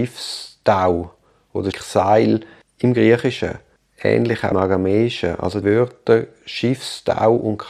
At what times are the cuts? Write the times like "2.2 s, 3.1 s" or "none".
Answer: 1.7 s, 4.5 s, 5.6 s